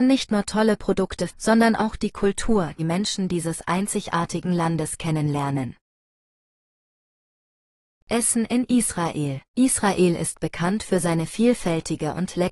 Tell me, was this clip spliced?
yes; 3 cuts; at 1.3 s, 2.8 s, 9.5 s

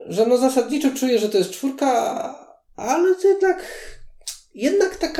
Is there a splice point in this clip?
no; 0 cuts

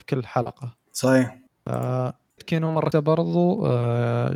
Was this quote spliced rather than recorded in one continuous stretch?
yes; 2 cuts; at 2.4 s, 2.9 s

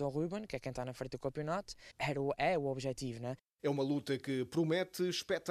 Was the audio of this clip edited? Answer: no; 0 cuts

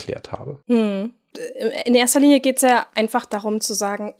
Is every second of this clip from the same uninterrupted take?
yes; 0 cuts

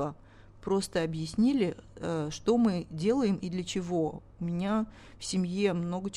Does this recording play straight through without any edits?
yes; 0 cuts

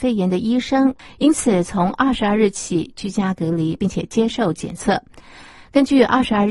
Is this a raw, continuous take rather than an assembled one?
yes; 0 cuts

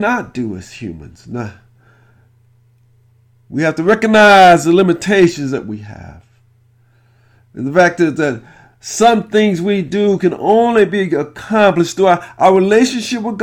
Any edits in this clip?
no; 0 cuts

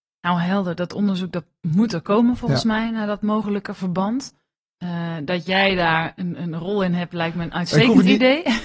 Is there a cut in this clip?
no; 0 cuts

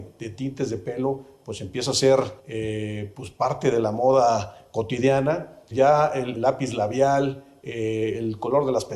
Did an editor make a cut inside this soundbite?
yes; 3 cuts; at 2.4 s, 5.7 s, 6.3 s

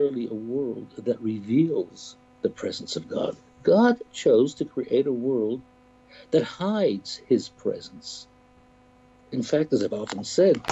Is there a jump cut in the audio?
no; 0 cuts

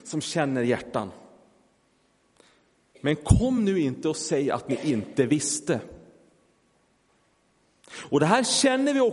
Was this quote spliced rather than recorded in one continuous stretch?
no; 0 cuts

